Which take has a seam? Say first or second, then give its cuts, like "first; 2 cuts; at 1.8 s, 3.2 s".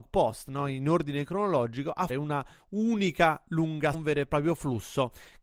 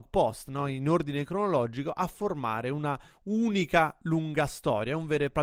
first; 2 cuts; at 2.1 s, 3.9 s